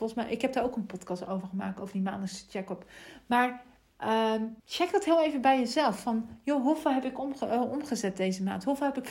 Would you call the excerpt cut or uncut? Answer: cut